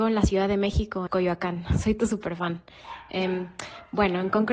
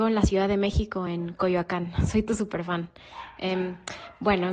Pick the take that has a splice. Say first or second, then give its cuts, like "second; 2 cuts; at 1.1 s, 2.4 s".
first; 1 cut; at 1.1 s